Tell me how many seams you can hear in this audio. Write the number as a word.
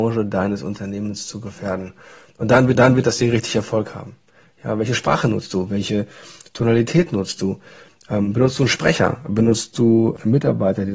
one